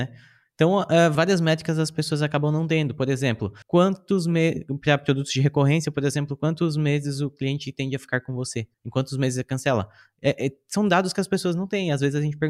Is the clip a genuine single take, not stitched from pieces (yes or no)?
no